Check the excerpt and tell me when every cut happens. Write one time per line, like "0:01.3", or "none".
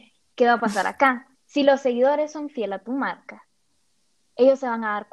0:01.3